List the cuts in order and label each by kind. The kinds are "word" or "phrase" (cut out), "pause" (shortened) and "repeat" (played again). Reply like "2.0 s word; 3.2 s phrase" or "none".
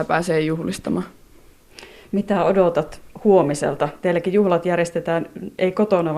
none